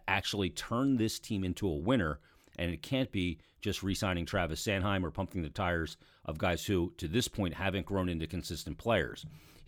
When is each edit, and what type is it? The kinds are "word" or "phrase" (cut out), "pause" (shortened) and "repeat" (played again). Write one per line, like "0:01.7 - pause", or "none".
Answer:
none